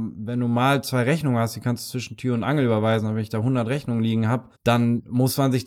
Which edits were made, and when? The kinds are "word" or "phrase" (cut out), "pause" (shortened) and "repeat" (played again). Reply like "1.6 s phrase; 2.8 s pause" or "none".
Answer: 4.5 s pause